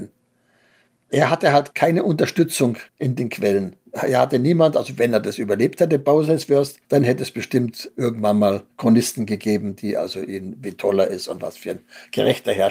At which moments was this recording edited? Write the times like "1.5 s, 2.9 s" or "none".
2.9 s, 3.9 s, 6.8 s, 8.7 s